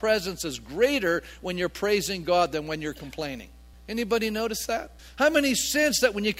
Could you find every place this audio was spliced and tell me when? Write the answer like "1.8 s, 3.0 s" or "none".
3.7 s, 5.0 s